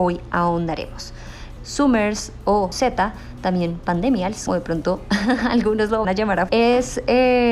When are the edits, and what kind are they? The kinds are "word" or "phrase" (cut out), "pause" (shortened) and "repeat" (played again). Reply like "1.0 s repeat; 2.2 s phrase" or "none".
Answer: 1.6 s phrase; 2.7 s word; 4.5 s word; 6.0 s word; 6.5 s word